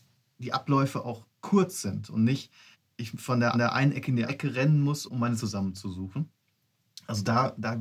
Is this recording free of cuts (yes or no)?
no